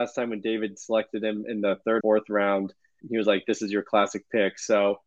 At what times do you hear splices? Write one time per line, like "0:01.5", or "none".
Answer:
0:02.0
0:03.0